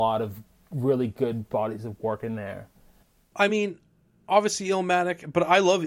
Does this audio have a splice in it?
no; 0 cuts

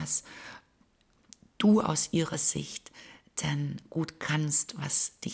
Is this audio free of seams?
yes; 0 cuts

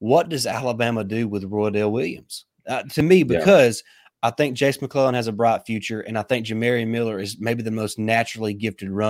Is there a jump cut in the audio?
no; 0 cuts

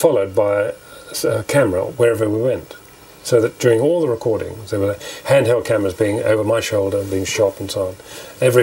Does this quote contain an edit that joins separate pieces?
no; 0 cuts

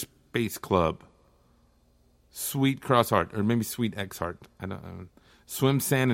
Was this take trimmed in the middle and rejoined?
no; 0 cuts

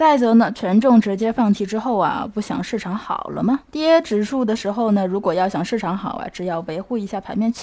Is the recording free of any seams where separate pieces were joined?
no; 1 cut; at 3.6 s

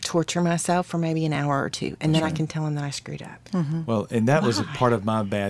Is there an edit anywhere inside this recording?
no; 0 cuts

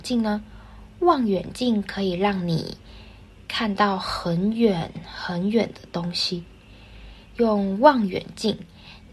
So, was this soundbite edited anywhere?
no; 0 cuts

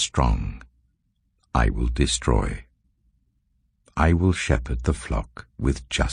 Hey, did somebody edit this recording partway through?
no; 0 cuts

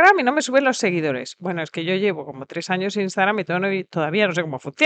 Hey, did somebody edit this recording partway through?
no; 0 cuts

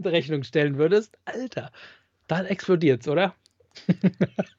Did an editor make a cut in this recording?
no; 0 cuts

